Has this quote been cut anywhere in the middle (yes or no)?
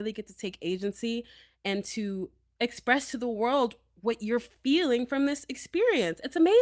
no